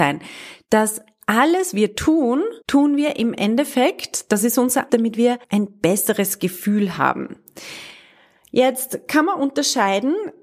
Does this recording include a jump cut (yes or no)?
yes